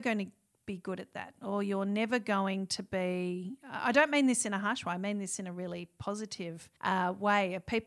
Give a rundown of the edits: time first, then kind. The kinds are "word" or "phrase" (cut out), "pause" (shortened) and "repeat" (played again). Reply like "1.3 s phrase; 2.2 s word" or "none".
6.8 s pause